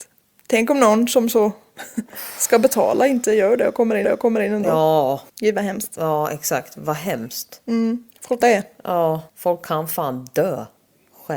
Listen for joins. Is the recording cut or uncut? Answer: cut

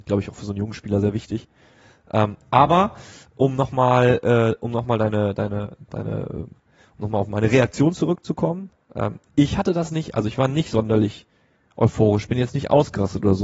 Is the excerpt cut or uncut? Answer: uncut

